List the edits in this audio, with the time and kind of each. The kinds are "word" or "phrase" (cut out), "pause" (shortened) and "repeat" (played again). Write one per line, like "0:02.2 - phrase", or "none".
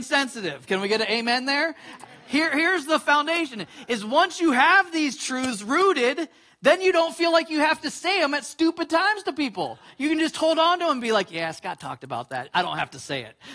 none